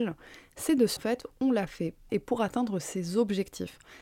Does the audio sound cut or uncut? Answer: cut